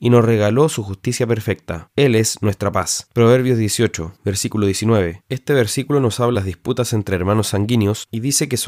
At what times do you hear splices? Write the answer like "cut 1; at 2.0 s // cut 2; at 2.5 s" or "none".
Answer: cut 1; at 6.3 s